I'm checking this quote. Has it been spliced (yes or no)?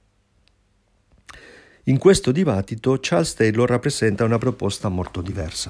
no